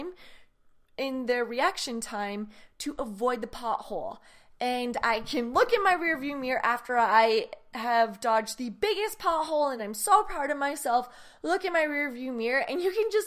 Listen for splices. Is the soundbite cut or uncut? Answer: uncut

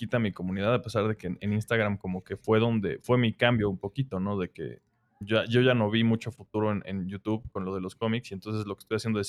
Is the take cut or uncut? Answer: uncut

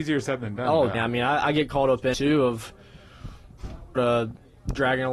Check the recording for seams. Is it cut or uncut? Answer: cut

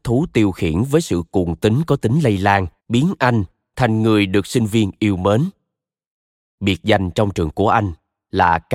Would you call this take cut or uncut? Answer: cut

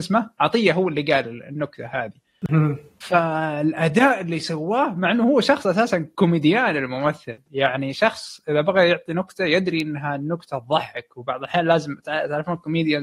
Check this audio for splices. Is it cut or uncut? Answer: uncut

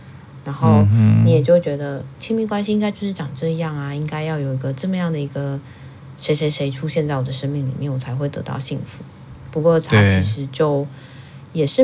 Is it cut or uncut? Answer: cut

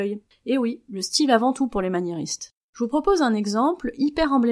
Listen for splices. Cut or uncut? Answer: cut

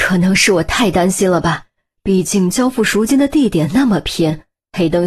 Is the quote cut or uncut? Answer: uncut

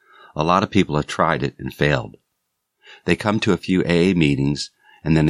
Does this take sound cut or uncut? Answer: uncut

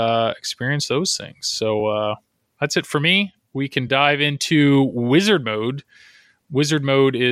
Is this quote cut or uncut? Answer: uncut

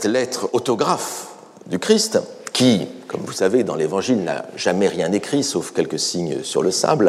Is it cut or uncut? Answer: uncut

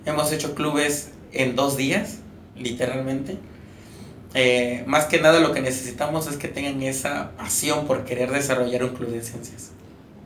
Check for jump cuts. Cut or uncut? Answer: cut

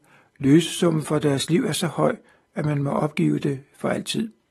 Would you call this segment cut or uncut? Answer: uncut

